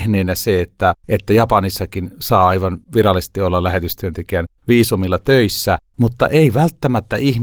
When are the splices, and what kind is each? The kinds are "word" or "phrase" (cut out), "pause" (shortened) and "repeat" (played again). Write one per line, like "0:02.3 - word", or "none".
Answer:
0:01.0 - pause
0:02.8 - pause
0:04.6 - pause
0:05.9 - pause